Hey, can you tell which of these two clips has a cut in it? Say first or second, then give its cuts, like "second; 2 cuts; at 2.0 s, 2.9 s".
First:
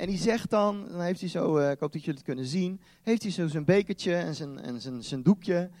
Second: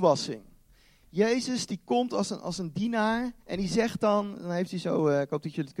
second; 1 cut; at 3.4 s